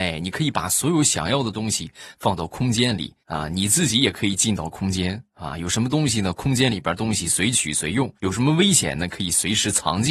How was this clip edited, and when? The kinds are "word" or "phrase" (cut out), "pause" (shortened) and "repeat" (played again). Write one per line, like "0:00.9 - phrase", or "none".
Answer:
0:03.2 - pause
0:08.2 - pause